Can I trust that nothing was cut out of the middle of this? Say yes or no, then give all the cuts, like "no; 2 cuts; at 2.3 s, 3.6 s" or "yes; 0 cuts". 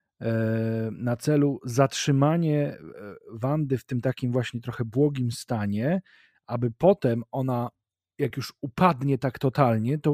yes; 0 cuts